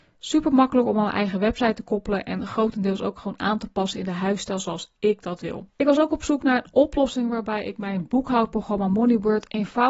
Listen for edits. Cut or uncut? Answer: cut